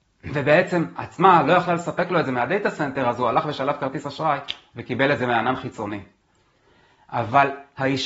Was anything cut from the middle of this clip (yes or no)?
yes